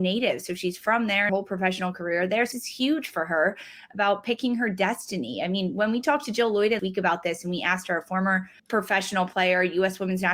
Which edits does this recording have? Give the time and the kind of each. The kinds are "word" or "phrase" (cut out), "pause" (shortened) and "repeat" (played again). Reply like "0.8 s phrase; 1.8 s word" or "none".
1.3 s phrase; 2.5 s word; 6.8 s word; 8.6 s pause